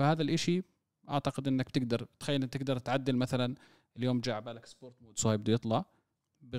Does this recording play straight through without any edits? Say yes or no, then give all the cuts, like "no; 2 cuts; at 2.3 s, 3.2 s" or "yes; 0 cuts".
yes; 0 cuts